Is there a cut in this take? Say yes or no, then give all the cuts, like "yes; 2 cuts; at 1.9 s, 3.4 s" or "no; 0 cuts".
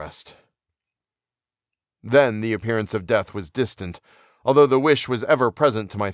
no; 0 cuts